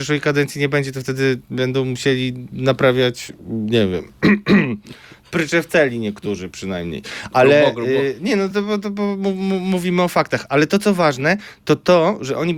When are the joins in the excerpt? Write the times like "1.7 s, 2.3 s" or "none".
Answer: none